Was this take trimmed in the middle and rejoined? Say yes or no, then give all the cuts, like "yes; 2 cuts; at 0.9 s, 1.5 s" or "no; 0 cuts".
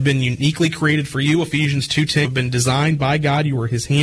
yes; 1 cut; at 2.2 s